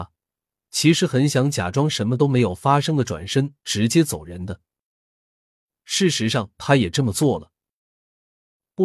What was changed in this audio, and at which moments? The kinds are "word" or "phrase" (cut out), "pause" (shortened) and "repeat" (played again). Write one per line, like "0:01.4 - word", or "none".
none